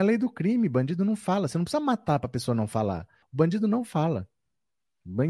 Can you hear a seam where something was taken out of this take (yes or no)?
yes